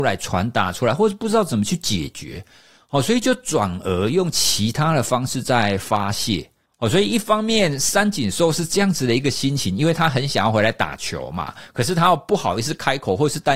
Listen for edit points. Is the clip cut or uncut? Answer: uncut